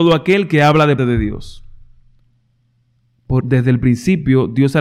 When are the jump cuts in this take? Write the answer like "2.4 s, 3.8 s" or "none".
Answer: 1.0 s, 3.4 s